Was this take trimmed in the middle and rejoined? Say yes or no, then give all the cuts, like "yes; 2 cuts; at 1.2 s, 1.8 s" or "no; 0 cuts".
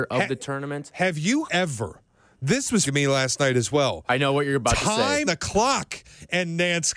yes; 3 cuts; at 1.5 s, 2.9 s, 5.3 s